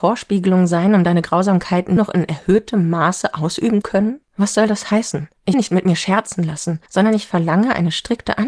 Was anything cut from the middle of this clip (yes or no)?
yes